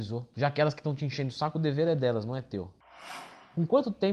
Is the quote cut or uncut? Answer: uncut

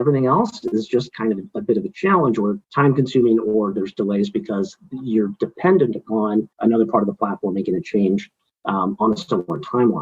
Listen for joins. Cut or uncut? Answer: cut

